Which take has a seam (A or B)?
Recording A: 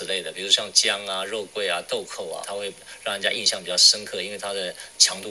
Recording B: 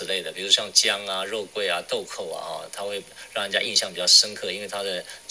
A